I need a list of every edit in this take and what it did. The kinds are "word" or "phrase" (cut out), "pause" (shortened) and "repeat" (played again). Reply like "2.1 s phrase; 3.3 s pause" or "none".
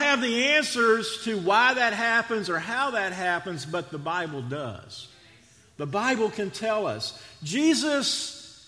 none